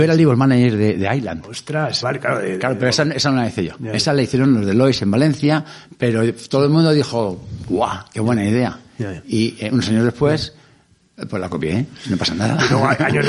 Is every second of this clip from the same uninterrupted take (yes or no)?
no